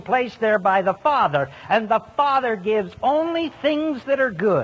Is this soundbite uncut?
yes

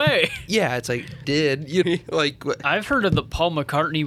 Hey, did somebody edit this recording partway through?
yes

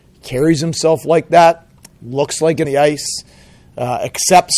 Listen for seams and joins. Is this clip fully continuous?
no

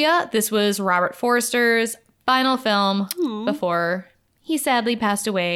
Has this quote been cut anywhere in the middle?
no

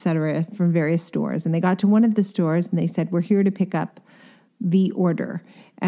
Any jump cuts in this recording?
no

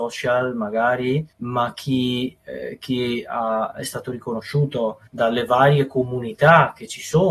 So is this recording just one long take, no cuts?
no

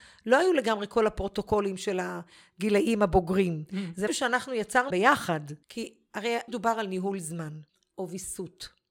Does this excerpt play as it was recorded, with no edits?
no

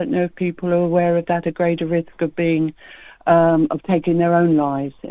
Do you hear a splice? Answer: no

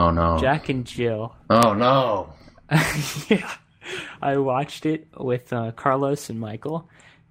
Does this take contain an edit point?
no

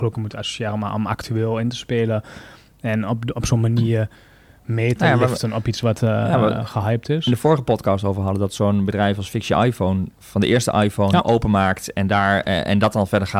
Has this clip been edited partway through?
no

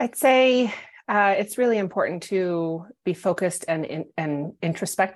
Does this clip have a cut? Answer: no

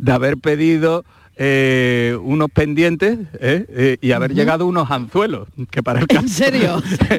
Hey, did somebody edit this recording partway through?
no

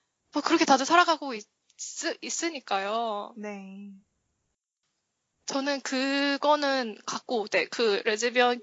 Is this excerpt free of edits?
yes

